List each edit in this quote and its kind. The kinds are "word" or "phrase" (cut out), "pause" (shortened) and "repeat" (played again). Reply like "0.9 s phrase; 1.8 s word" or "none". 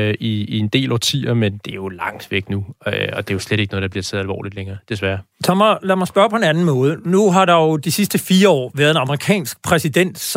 none